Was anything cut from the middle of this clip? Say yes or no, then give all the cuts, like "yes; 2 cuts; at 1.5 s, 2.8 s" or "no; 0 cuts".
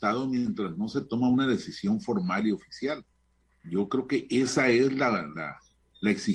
no; 0 cuts